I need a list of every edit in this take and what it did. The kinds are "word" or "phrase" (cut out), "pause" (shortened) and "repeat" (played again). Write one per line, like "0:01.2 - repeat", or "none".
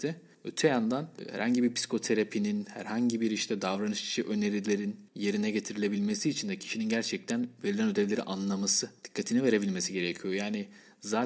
0:05.1 - pause